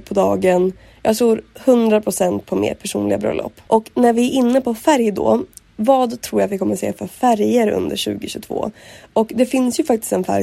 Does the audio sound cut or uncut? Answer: uncut